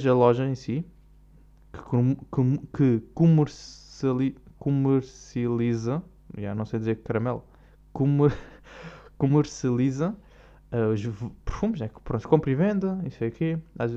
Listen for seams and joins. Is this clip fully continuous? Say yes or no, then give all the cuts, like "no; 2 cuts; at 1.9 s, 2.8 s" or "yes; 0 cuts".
yes; 0 cuts